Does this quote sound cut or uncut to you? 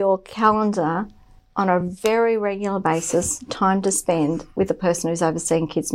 uncut